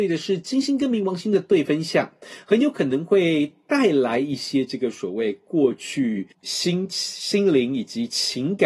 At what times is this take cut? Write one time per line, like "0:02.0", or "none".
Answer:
0:06.3

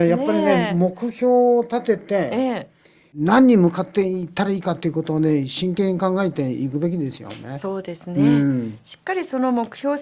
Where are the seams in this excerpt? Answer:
none

